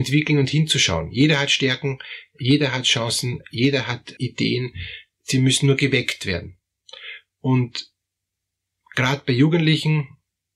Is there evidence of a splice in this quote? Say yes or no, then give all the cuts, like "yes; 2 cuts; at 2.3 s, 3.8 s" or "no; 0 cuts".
yes; 1 cut; at 4.2 s